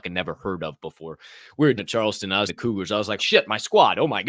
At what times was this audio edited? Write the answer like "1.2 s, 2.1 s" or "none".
1.8 s, 2.5 s, 3.2 s